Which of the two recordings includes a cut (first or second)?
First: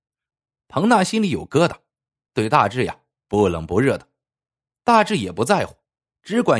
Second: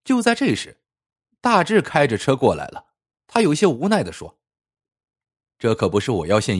second